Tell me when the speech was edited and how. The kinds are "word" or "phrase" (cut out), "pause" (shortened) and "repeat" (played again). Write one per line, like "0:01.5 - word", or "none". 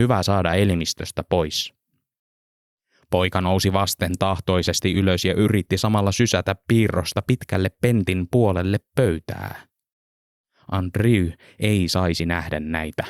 none